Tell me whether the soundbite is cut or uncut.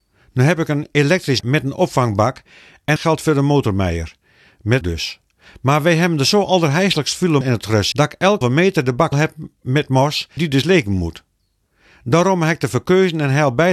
cut